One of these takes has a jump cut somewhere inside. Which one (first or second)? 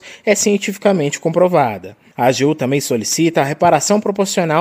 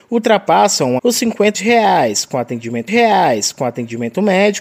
second